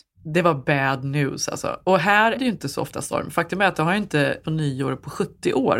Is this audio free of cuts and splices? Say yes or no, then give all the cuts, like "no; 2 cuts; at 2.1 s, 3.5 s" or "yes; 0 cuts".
no; 2 cuts; at 2.3 s, 4.4 s